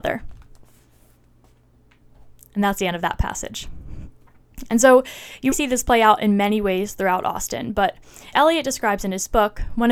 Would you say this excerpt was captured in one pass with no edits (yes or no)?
no